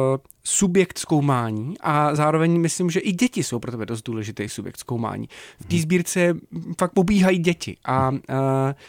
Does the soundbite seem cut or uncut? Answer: uncut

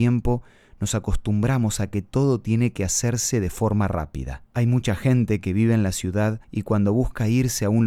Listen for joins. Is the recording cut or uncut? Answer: cut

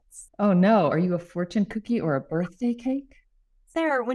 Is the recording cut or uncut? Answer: uncut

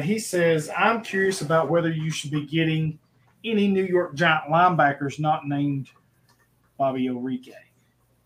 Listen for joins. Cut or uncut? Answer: uncut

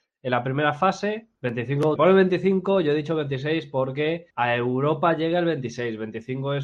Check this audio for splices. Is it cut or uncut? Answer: cut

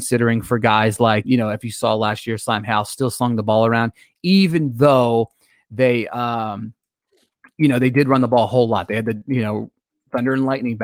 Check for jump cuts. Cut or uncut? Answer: cut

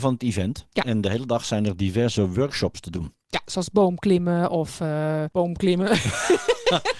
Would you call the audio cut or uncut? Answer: cut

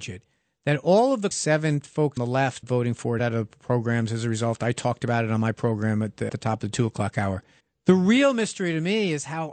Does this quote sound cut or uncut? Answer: cut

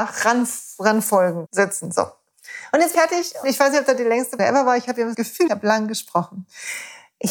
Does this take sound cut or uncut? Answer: cut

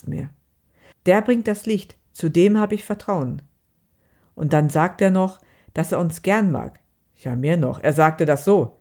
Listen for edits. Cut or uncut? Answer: uncut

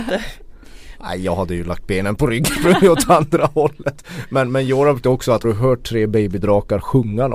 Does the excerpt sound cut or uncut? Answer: cut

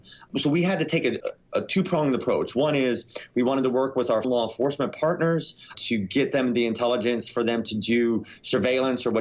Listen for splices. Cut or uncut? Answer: cut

